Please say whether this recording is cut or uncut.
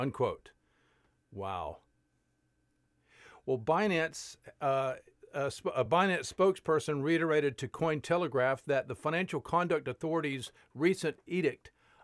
uncut